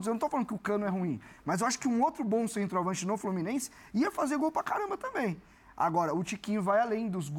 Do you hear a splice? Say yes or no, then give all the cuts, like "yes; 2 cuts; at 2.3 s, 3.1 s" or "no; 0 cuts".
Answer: no; 0 cuts